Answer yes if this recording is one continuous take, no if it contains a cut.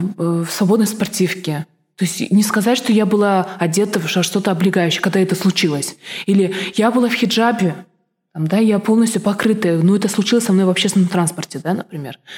yes